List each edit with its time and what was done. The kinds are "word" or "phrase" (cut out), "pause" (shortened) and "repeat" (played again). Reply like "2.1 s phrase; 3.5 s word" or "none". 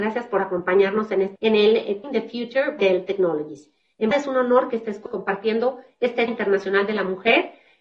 1.4 s word; 2.0 s word; 2.8 s word; 4.1 s word; 5.1 s word; 6.3 s word